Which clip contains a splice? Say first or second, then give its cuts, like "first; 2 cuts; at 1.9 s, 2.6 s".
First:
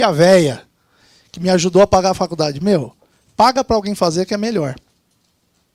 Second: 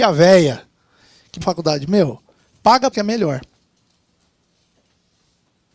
second; 2 cuts; at 1.4 s, 2.9 s